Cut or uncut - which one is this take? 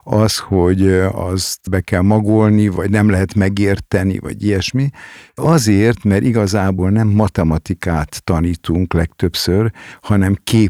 uncut